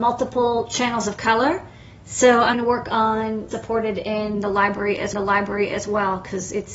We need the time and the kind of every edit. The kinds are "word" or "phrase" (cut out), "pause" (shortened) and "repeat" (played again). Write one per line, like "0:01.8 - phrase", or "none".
0:02.5 - word
0:03.5 - phrase
0:05.1 - repeat